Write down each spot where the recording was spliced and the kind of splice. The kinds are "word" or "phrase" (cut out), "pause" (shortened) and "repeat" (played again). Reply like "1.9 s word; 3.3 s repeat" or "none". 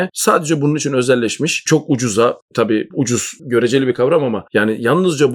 none